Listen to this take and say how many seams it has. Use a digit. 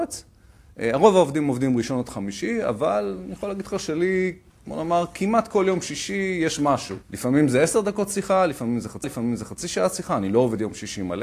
3